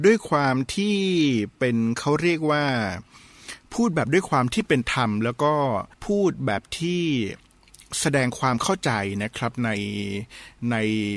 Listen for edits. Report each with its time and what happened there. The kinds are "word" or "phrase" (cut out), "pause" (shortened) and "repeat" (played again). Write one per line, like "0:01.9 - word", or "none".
0:05.9 - pause

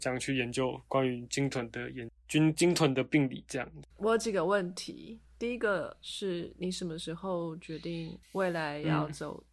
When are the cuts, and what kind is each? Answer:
0:03.9 - pause
0:08.2 - pause

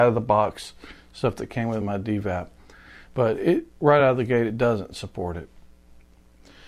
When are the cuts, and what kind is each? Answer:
none

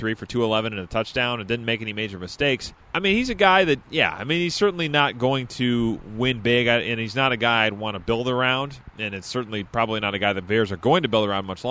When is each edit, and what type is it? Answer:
0:02.8 - pause
0:03.8 - pause
0:08.9 - pause

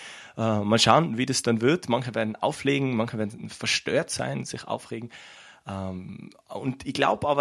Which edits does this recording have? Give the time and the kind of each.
none

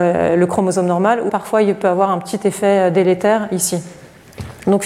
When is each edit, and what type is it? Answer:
0:01.3 - word

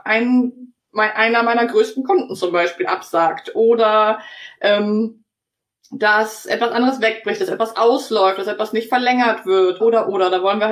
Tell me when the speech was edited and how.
0:09.8 - word

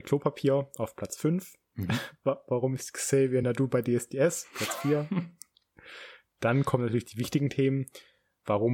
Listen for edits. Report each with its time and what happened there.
none

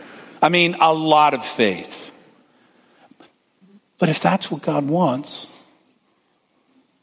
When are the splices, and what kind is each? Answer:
none

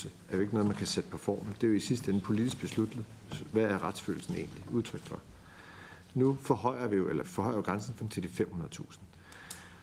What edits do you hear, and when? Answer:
0:07.2 - word
0:08.0 - word

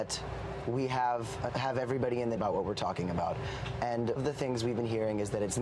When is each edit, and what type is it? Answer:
0:01.5 - phrase
0:02.4 - phrase
0:04.2 - word

